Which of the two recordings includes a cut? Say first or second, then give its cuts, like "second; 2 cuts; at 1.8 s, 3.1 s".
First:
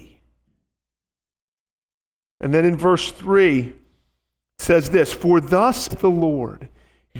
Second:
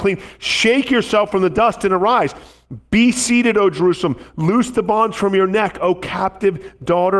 first; 1 cut; at 5.9 s